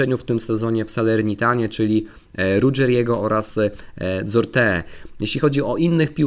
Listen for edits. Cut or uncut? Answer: uncut